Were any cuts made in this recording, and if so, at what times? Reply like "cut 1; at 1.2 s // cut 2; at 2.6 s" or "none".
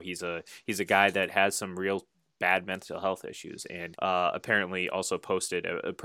cut 1; at 3.9 s